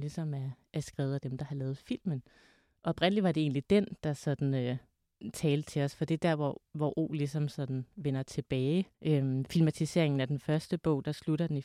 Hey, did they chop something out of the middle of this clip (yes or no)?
yes